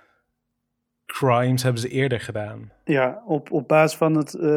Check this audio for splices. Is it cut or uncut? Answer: uncut